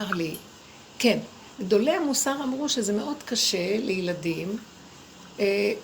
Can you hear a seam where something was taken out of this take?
no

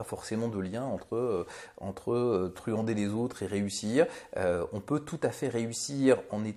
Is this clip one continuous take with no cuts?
yes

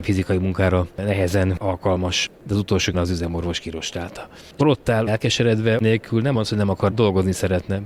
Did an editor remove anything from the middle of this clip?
yes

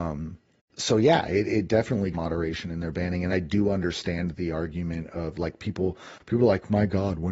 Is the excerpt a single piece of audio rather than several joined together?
no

